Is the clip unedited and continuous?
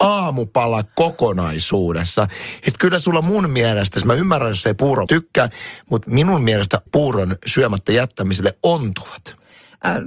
no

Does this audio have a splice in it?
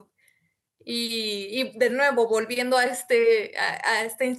no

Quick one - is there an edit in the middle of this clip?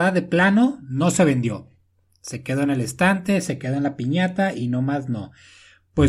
no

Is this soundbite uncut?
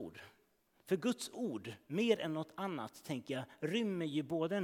yes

